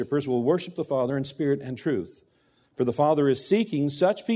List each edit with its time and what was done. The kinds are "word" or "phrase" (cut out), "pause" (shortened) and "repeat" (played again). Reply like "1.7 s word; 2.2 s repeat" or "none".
none